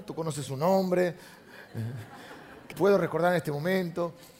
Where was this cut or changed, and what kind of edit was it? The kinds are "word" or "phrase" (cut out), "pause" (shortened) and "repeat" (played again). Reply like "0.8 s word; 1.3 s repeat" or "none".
2.7 s word